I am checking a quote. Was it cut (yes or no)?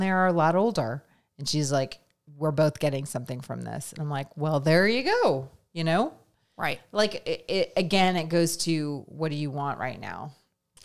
no